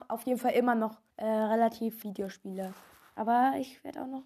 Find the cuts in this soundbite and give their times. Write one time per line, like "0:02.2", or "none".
0:01.1
0:02.0